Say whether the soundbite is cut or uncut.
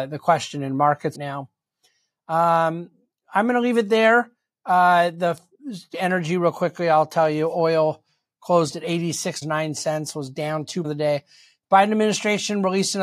cut